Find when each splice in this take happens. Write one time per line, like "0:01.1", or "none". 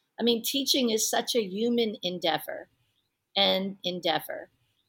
0:03.8